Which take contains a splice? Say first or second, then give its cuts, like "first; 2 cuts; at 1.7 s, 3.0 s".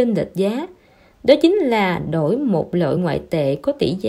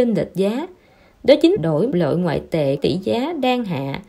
second; 3 cuts; at 1.6 s, 1.9 s, 2.8 s